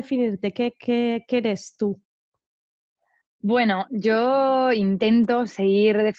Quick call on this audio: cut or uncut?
uncut